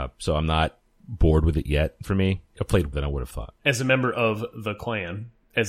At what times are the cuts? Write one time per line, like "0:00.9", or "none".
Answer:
0:01.0
0:02.0
0:02.5
0:02.9
0:03.6